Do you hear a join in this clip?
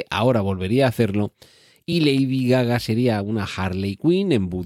no; 0 cuts

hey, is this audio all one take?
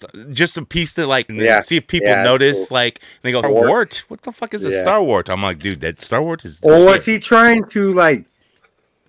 no; 2 cuts; at 1.3 s, 3.4 s

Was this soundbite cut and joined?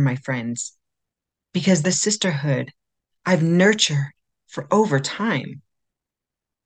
yes; 1 cut; at 1.8 s

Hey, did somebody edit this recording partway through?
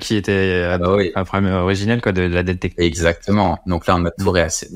no; 0 cuts

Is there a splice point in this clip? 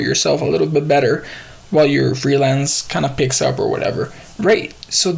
no; 0 cuts

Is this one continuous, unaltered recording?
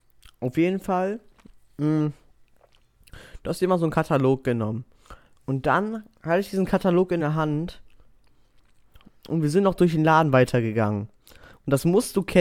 yes; 0 cuts

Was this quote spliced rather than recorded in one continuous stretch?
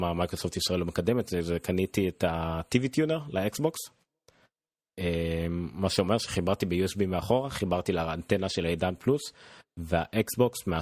no; 0 cuts

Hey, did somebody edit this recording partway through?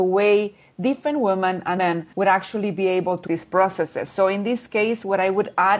yes; 3 cuts; at 1.8 s, 2.1 s, 3.3 s

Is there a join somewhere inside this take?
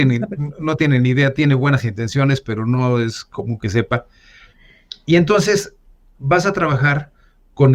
no; 0 cuts

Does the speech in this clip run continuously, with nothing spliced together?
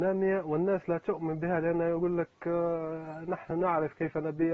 yes; 0 cuts

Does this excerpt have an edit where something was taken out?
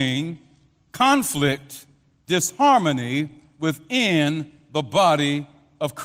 no; 0 cuts

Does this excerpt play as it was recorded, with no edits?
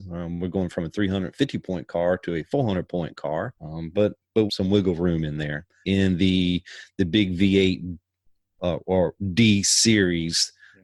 no; 3 cuts; at 3.6 s, 4.5 s, 5.8 s

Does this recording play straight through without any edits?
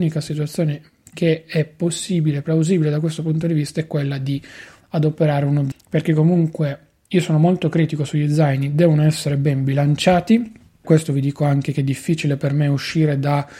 no; 2 cuts; at 5.7 s, 10.8 s

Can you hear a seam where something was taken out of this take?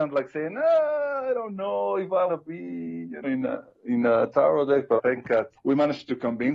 yes; 5 cuts; at 2.3 s, 3.2 s, 3.7 s, 5.0 s, 5.5 s

